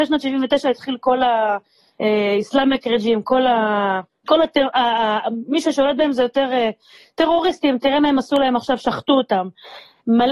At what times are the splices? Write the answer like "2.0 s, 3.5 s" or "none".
none